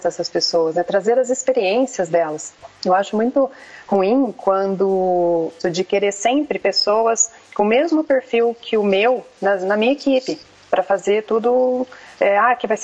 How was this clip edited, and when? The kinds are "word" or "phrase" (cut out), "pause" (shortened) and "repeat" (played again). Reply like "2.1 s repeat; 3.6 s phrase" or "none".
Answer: none